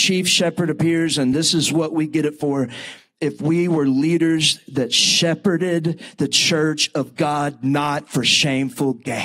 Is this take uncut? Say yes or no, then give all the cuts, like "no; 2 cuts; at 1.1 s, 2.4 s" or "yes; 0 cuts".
yes; 0 cuts